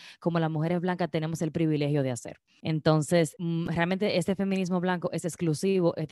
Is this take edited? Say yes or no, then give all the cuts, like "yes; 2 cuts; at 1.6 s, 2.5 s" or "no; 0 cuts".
no; 0 cuts